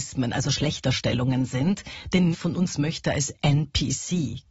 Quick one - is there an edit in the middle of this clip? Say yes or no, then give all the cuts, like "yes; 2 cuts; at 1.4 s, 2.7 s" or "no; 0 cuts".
yes; 1 cut; at 2.3 s